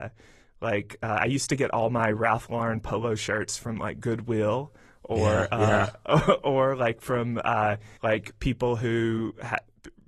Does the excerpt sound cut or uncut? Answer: cut